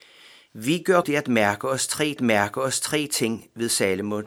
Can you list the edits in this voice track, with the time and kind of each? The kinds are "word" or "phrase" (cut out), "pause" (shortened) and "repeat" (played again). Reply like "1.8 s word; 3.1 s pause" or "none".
1.0 s word; 2.2 s repeat